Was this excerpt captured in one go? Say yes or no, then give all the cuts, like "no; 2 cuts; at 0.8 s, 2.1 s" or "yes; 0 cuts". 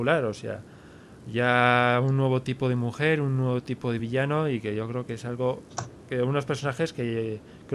yes; 0 cuts